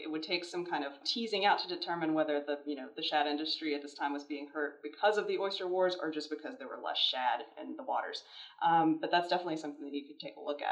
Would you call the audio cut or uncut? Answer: uncut